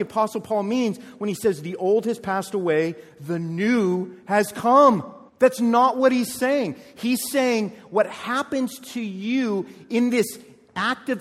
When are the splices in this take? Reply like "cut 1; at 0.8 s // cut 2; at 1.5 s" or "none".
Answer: cut 1; at 5.3 s

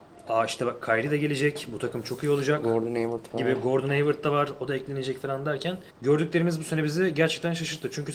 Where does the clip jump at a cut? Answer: cut 1; at 5.9 s

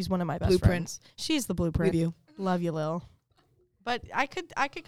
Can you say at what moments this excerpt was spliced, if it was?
cut 1; at 1.1 s // cut 2; at 1.9 s

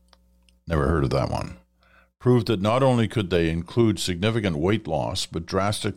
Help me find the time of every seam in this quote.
none

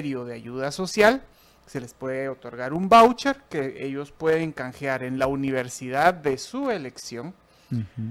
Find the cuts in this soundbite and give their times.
none

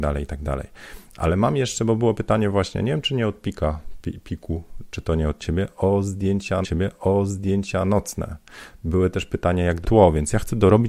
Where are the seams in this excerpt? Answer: cut 1; at 6.6 s // cut 2; at 9.8 s

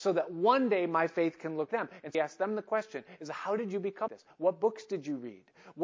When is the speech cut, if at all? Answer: cut 1; at 1.7 s // cut 2; at 2.1 s // cut 3; at 4.1 s

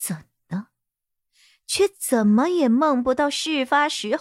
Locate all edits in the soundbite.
none

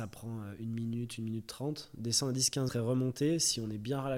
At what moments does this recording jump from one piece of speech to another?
cut 1; at 2.7 s

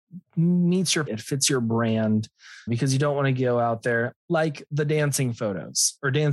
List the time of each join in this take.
cut 1; at 1.1 s // cut 2; at 2.7 s

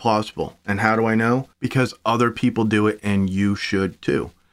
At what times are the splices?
cut 1; at 1.5 s

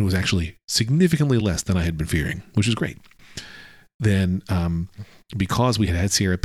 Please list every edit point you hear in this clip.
none

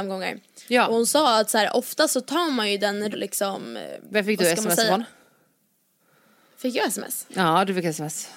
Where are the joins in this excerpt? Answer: cut 1; at 3.1 s

